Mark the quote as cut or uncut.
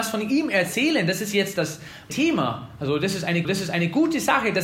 cut